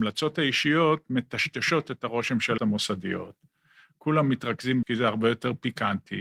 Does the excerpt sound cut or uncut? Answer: cut